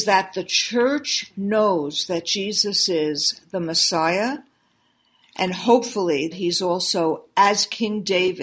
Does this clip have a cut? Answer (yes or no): yes